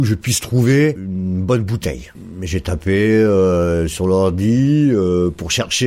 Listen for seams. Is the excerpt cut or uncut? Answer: uncut